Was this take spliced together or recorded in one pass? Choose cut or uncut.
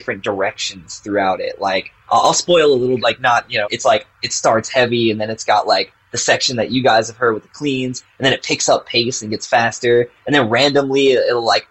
cut